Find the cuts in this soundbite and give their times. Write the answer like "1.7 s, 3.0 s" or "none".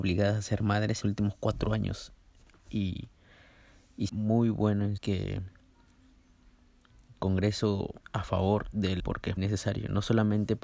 1.0 s, 4.1 s, 5.0 s, 7.2 s, 8.0 s, 9.0 s, 9.4 s

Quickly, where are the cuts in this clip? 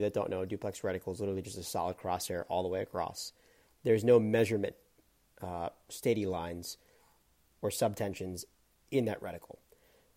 none

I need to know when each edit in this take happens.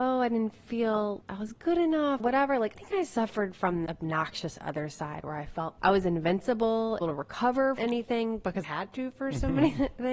1.2 s, 2.2 s, 2.7 s, 3.9 s, 5.8 s, 7.0 s, 7.8 s, 8.6 s

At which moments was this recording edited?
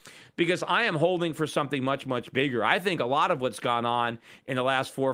none

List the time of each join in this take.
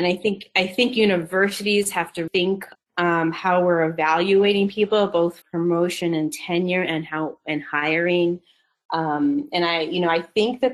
2.3 s, 2.8 s, 5.4 s

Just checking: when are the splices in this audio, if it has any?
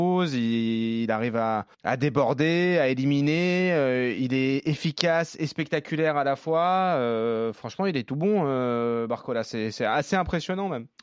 1.7 s

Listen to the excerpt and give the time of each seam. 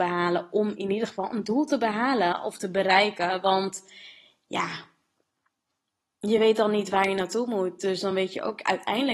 none

